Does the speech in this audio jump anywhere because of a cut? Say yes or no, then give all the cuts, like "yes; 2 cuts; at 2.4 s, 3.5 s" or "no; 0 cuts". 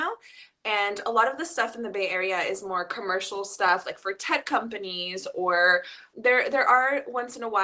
yes; 1 cut; at 6.1 s